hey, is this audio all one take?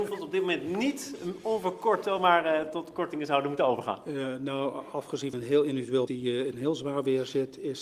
no; 2 cuts; at 5.3 s, 6.1 s

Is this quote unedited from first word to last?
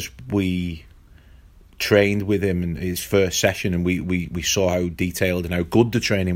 yes; 0 cuts

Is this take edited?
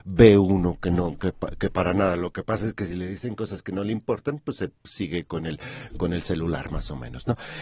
no; 0 cuts

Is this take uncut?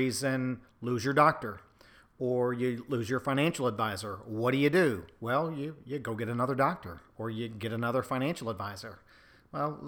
yes; 0 cuts

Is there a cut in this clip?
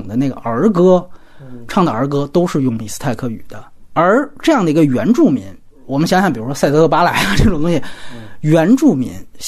no; 0 cuts

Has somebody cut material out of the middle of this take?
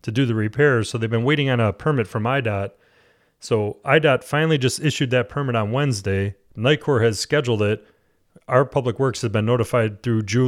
no; 0 cuts

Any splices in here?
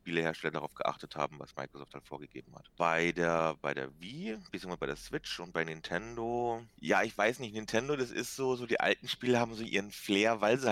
no; 0 cuts

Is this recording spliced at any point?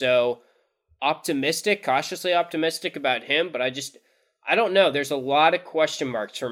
no; 0 cuts

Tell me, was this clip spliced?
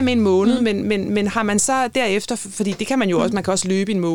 no; 0 cuts

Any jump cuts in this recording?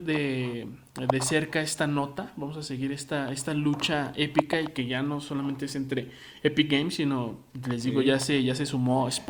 no; 0 cuts

